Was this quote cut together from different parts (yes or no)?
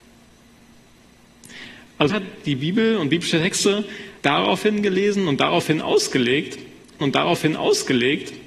yes